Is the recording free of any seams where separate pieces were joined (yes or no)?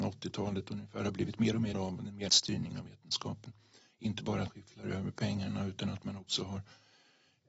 no